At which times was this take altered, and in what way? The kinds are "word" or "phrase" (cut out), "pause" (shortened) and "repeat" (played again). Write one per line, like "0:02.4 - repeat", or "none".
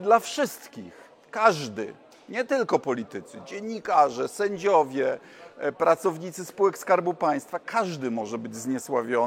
none